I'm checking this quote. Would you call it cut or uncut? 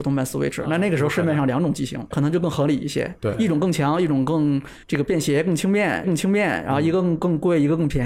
cut